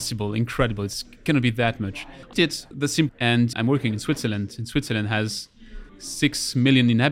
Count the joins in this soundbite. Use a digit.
4